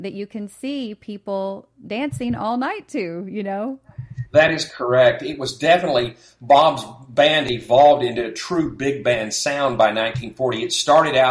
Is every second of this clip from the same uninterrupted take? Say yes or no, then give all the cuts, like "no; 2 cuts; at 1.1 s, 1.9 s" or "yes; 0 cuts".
yes; 0 cuts